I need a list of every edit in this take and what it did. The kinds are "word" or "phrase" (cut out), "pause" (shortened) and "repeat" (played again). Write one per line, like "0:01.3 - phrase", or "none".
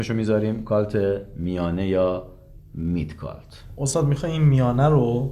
none